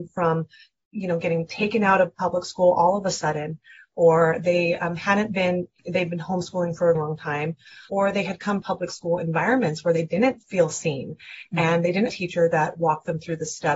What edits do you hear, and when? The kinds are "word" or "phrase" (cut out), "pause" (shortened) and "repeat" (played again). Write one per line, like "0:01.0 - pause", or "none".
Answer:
0:07.0 - word
0:07.9 - word
0:08.6 - phrase
0:10.4 - pause
0:12.1 - phrase